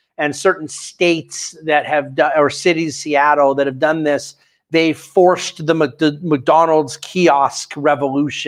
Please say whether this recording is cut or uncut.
uncut